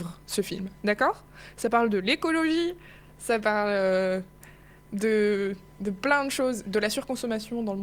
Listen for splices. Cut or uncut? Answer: uncut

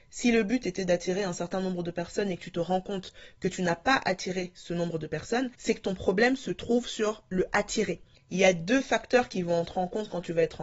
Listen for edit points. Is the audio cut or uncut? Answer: cut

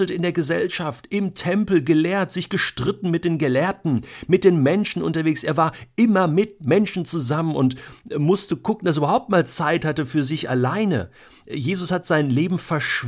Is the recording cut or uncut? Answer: uncut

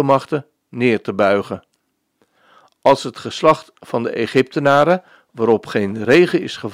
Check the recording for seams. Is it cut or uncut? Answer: uncut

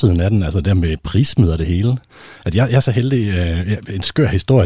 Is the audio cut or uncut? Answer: uncut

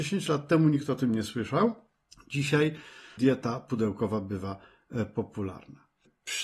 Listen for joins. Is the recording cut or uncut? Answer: uncut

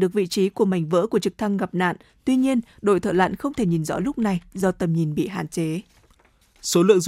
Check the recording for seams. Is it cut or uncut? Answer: uncut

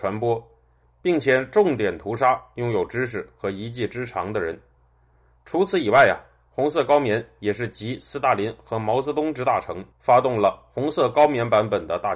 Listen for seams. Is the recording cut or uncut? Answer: cut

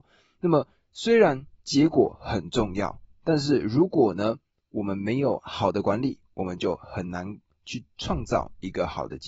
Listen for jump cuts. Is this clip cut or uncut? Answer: uncut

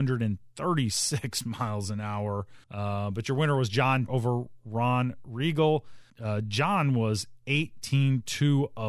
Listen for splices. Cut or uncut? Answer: cut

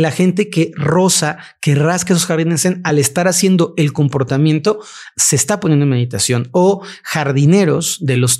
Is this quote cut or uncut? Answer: uncut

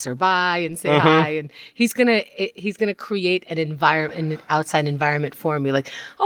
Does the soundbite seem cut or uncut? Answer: uncut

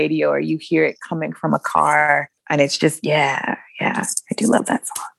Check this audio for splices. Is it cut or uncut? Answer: uncut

